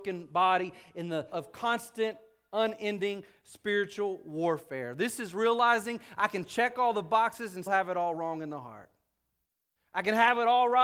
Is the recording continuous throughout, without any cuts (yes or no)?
no